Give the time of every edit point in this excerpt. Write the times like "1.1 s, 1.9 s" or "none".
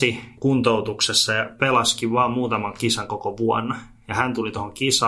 none